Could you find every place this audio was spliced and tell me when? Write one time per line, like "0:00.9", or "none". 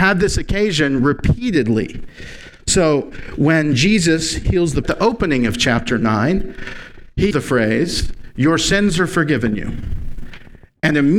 0:04.8
0:07.3